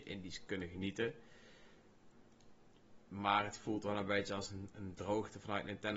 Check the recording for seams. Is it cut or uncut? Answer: uncut